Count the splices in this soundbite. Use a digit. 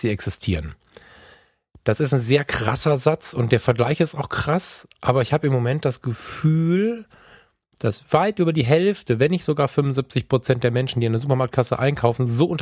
0